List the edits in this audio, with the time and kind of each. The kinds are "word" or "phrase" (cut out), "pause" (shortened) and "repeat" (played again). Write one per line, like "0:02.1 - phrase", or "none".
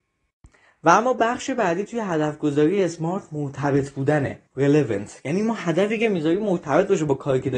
0:04.5 - pause